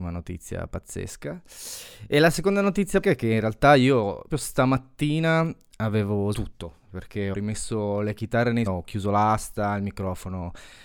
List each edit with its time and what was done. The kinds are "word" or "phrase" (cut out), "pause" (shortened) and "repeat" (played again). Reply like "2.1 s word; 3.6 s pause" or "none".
3.0 s word; 4.3 s word; 6.3 s word; 7.3 s word; 8.7 s word